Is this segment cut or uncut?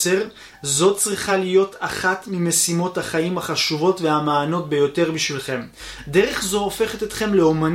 uncut